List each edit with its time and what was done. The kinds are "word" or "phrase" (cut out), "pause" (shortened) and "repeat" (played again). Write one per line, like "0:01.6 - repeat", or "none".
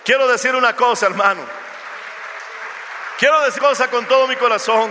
0:03.6 - word